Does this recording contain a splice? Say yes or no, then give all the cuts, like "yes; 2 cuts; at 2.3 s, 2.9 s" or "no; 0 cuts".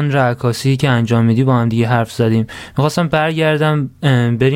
no; 0 cuts